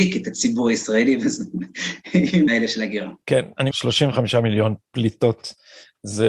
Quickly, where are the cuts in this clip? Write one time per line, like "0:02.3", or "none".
0:02.5
0:03.2
0:03.7
0:04.8